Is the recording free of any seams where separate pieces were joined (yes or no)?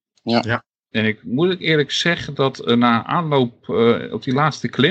yes